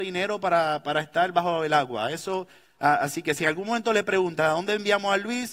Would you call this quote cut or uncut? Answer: uncut